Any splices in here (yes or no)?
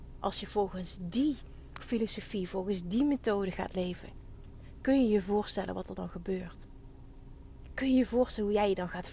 no